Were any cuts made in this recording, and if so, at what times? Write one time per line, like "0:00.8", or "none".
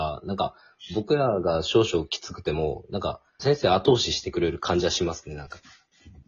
0:03.4